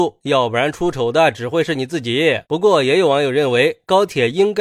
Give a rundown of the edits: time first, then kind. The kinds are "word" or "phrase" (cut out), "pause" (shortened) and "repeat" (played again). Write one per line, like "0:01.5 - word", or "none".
0:02.4 - pause